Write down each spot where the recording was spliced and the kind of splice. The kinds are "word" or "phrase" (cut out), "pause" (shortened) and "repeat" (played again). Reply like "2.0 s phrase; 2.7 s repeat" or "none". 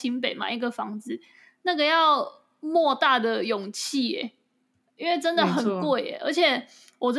none